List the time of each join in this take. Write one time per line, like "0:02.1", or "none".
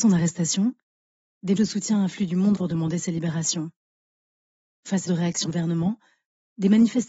0:01.6
0:02.6
0:05.1
0:05.4